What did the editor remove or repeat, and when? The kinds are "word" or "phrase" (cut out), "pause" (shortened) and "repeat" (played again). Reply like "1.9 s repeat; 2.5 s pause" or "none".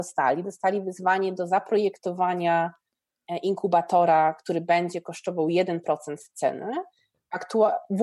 none